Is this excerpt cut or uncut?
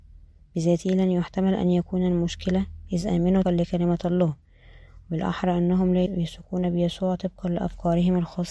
cut